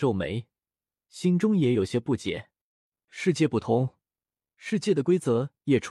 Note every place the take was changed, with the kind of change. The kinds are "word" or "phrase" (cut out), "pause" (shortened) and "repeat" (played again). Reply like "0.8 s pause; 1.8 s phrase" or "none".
none